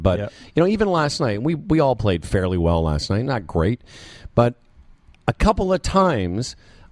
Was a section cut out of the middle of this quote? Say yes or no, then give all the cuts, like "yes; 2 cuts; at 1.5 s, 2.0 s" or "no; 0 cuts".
no; 0 cuts